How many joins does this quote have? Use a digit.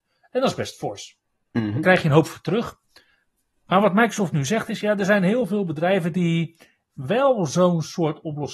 0